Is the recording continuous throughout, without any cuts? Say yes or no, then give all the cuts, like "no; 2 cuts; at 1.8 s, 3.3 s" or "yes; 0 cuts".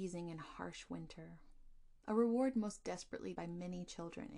no; 2 cuts; at 2.0 s, 3.3 s